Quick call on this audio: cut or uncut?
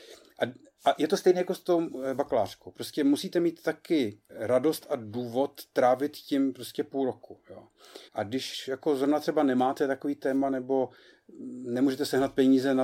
cut